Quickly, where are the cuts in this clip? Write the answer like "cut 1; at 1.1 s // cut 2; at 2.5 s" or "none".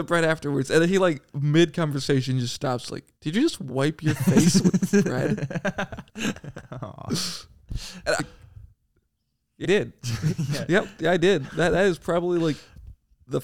cut 1; at 3.2 s // cut 2; at 6.1 s // cut 3; at 8.2 s // cut 4; at 9.6 s